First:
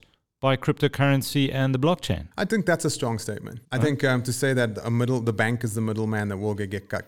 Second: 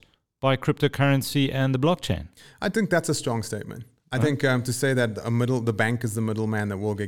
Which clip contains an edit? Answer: first; 2 cuts; at 2.3 s, 3.6 s

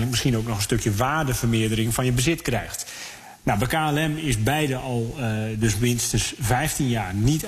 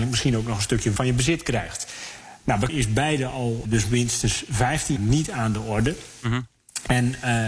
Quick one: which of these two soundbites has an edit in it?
second; 4 cuts; at 1.0 s, 2.7 s, 3.6 s, 5.0 s

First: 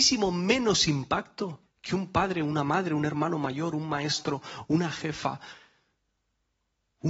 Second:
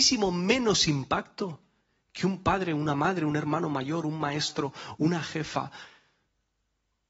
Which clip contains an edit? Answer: first; 1 cut; at 1.7 s

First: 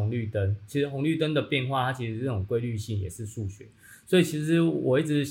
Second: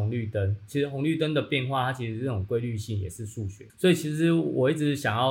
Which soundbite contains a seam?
second; 1 cut; at 3.7 s

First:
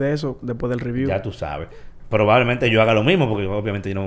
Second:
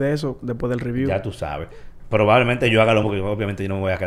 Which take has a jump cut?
second; 1 cut; at 3.0 s

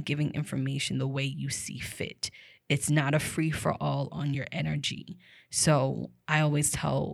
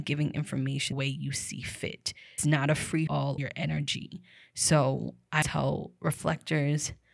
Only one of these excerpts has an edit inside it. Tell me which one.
second; 5 cuts; at 0.9 s, 2.4 s, 3.1 s, 3.4 s, 5.4 s

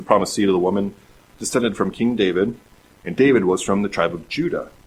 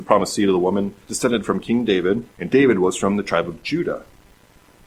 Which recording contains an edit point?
second; 2 cuts; at 1.0 s, 2.3 s

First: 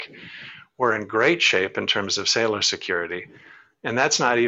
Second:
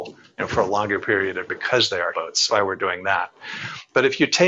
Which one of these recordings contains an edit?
second; 3 cuts; at 1.5 s, 2.1 s, 2.5 s

